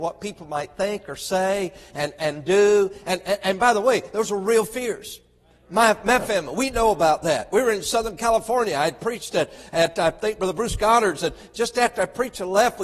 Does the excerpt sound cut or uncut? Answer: uncut